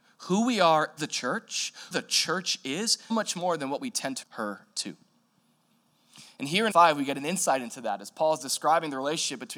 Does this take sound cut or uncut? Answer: cut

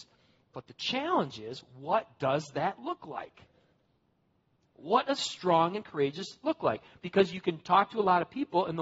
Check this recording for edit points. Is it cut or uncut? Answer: uncut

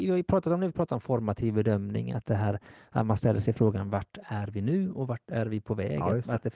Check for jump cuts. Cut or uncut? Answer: uncut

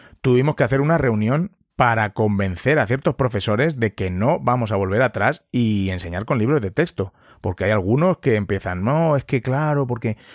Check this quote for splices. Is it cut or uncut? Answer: uncut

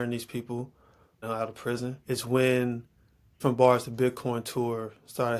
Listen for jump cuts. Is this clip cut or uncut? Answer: cut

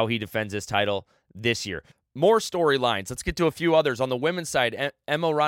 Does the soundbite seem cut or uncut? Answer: uncut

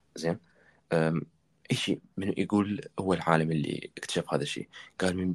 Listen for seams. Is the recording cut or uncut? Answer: uncut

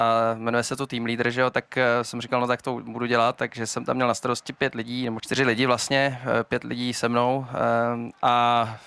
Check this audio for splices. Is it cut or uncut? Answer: cut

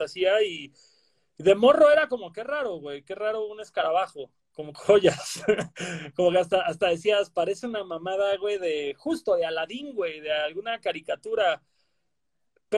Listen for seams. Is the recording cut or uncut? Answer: cut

